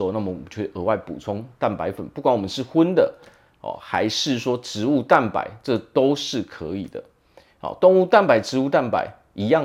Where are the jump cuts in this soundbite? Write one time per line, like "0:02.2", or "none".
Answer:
none